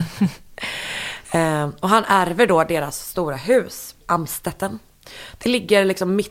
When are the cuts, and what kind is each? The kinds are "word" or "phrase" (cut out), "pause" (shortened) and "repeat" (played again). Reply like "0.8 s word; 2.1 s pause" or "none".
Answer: 4.0 s word